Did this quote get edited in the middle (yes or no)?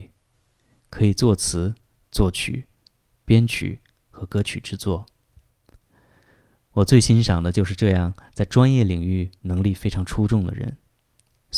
no